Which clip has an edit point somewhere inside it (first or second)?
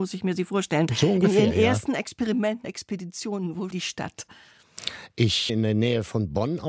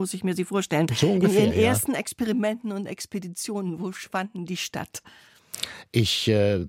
first